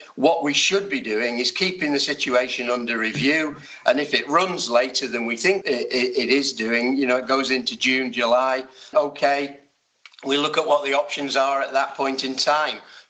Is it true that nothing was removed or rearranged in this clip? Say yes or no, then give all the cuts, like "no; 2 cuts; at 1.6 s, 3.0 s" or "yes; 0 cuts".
no; 2 cuts; at 5.6 s, 8.9 s